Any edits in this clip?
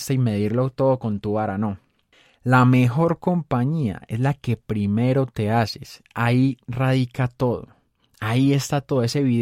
no; 0 cuts

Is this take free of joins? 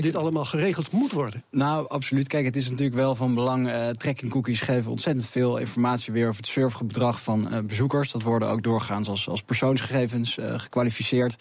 yes; 0 cuts

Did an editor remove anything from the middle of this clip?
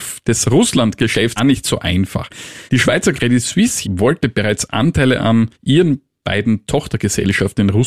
yes; 5 cuts; at 1.4 s, 2.7 s, 3.1 s, 3.8 s, 5.5 s

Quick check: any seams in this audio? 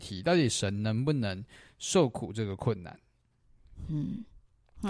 no; 0 cuts

